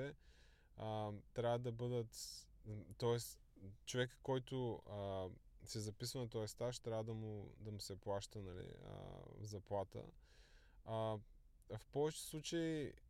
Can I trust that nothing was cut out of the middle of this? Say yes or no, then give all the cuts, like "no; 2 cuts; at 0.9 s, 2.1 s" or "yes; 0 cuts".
yes; 0 cuts